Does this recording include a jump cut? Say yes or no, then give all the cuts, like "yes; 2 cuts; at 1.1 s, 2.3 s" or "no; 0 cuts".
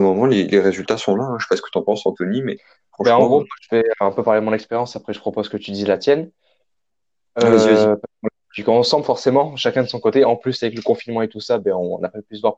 no; 0 cuts